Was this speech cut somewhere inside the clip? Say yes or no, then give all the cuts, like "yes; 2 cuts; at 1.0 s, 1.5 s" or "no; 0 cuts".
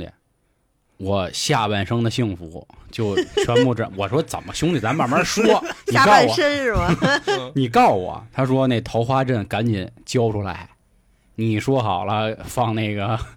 no; 0 cuts